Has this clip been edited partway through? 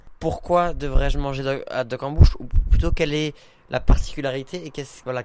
no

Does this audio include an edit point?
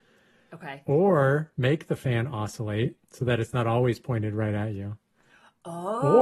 no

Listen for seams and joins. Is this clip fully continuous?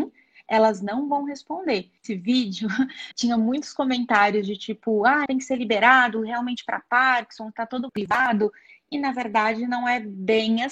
no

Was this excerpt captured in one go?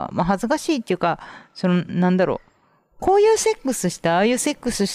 yes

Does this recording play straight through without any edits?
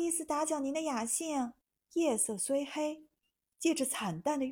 no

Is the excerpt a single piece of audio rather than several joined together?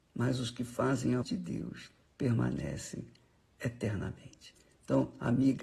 no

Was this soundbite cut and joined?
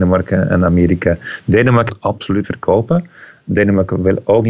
yes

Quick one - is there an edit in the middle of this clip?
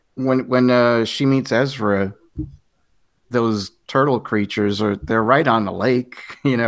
no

